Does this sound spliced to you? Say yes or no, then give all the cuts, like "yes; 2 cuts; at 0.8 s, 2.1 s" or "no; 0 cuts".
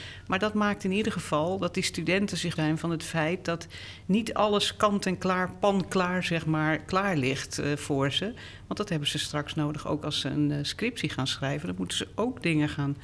yes; 1 cut; at 2.6 s